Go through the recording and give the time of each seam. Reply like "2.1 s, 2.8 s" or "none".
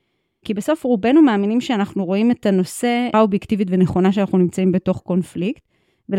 3.1 s